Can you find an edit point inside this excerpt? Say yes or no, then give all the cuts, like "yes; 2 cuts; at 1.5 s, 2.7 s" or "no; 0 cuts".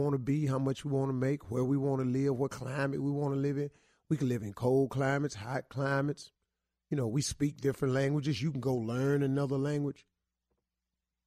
no; 0 cuts